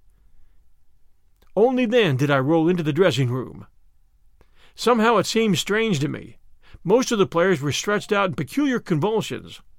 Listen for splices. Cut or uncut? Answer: uncut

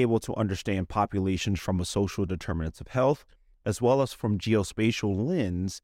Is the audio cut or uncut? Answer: uncut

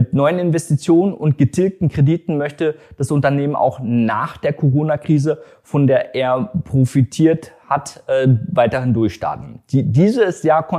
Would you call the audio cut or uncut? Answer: uncut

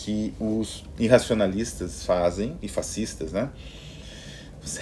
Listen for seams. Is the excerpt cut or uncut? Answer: uncut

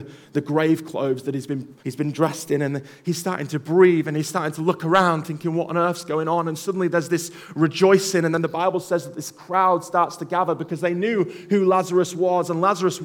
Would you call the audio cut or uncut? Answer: cut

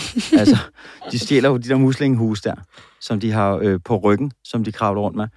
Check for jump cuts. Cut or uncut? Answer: uncut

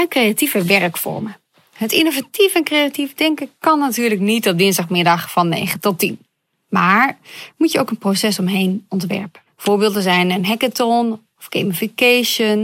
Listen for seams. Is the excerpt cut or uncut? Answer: cut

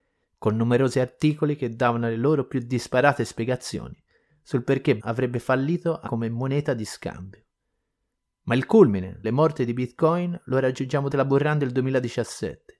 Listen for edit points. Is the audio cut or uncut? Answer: cut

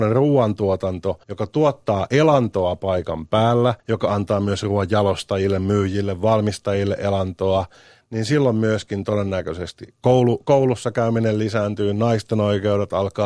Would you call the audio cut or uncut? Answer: cut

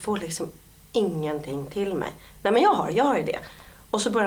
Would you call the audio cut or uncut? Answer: uncut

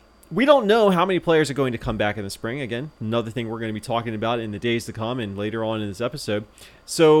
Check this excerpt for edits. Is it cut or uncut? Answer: cut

